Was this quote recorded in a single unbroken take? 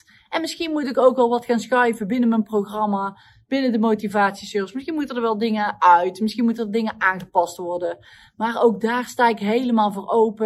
yes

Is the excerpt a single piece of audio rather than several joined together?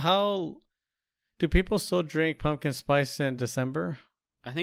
yes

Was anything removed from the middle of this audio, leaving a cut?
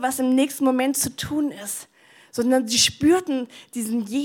no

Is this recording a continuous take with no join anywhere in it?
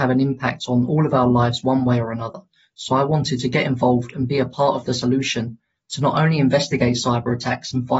yes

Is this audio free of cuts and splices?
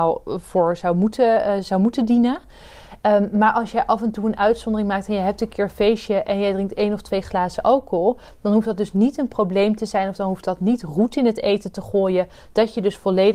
yes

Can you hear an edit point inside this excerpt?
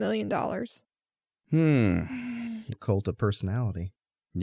yes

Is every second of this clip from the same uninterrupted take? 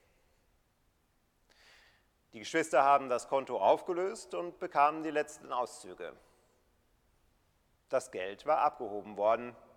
yes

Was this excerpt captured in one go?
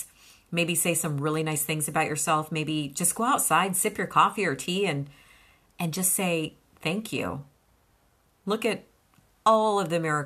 yes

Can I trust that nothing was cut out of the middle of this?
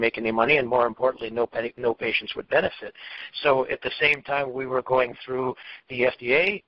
yes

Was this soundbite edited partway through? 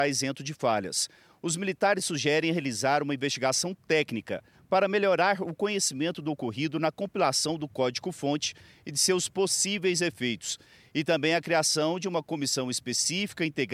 no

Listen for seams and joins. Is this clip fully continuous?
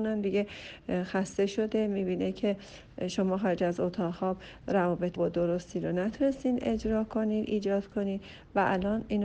no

